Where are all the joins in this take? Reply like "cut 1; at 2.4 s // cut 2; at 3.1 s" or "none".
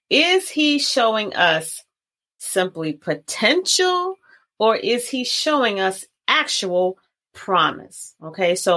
none